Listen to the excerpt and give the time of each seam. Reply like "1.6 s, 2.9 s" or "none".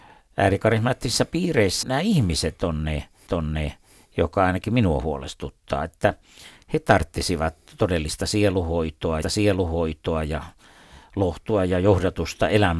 1.8 s, 3.3 s, 9.2 s